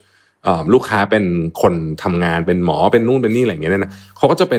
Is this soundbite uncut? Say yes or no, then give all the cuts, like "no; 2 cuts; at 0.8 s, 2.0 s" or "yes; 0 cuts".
yes; 0 cuts